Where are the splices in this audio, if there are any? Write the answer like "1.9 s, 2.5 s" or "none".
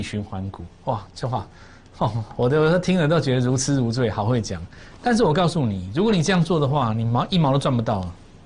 none

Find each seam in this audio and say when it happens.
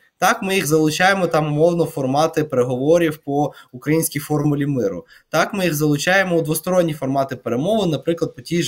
none

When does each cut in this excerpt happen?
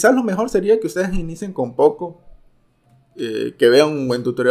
none

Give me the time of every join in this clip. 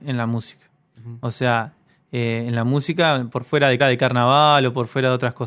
3.8 s

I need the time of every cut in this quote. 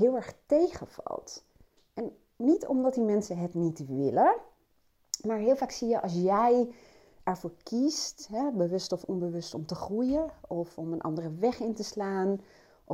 none

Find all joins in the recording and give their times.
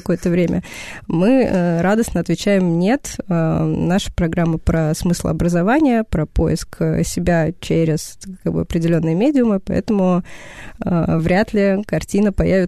none

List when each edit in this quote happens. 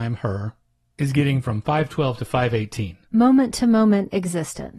3.0 s

